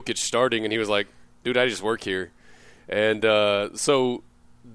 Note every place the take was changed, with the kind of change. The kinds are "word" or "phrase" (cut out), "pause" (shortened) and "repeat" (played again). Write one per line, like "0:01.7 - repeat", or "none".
none